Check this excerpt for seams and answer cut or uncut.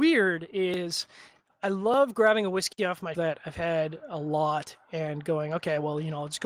cut